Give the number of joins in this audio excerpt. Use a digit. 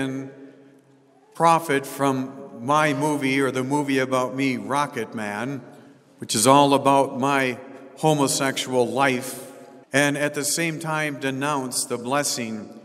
2